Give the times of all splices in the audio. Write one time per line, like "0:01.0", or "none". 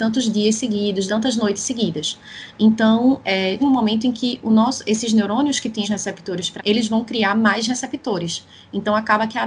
0:01.1
0:03.6
0:05.8
0:06.6